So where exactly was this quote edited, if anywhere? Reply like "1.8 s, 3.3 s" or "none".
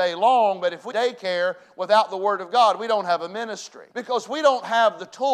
0.9 s, 3.9 s